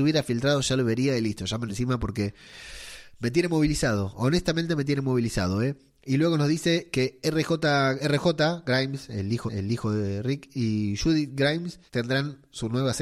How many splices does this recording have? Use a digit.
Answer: 4